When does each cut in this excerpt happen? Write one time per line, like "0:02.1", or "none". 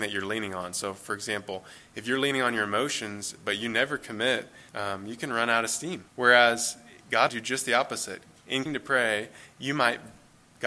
0:04.7
0:06.1
0:07.3
0:08.7